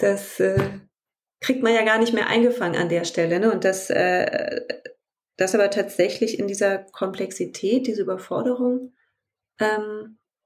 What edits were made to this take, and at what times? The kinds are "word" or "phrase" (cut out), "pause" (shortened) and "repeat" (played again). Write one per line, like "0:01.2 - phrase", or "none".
none